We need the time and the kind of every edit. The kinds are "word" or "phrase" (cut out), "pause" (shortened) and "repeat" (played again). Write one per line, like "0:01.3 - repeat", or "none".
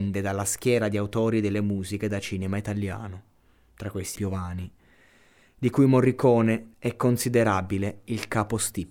0:04.2 - word
0:06.7 - pause